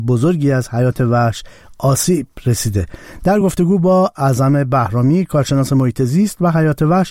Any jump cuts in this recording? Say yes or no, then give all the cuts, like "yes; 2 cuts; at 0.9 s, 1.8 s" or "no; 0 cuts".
no; 0 cuts